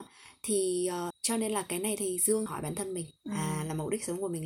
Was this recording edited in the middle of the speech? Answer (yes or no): yes